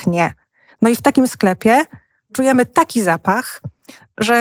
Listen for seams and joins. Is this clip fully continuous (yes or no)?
yes